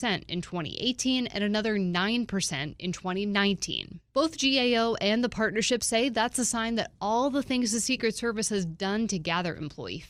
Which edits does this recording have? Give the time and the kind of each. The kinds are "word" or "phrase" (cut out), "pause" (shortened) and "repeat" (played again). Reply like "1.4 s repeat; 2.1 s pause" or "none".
4.1 s pause